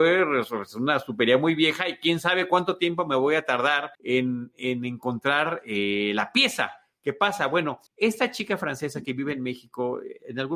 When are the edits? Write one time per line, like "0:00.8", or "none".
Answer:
0:03.9
0:07.9